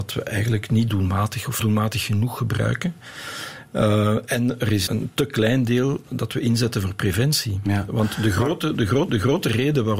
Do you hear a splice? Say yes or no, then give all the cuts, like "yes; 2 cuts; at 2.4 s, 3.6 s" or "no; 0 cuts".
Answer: yes; 3 cuts; at 1.6 s, 4.9 s, 9.1 s